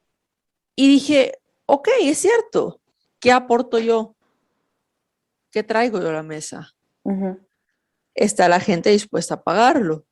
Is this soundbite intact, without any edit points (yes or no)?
yes